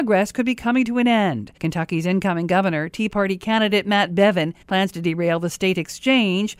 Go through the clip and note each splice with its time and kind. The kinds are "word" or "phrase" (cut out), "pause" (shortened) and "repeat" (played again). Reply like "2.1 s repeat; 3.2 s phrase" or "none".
1.6 s pause; 4.6 s pause